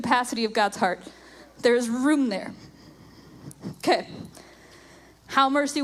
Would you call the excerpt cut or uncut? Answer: uncut